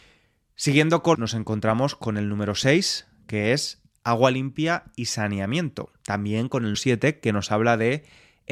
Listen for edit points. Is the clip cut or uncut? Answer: cut